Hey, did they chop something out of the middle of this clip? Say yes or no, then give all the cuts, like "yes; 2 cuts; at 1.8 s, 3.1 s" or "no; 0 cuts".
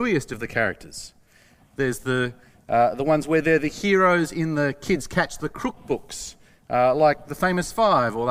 no; 0 cuts